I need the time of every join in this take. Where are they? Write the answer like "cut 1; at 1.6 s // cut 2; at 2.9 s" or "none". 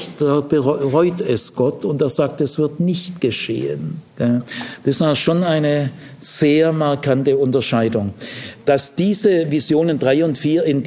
cut 1; at 4.1 s